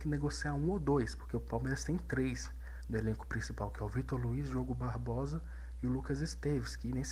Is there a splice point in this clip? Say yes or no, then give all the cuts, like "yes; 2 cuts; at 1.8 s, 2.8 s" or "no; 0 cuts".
no; 0 cuts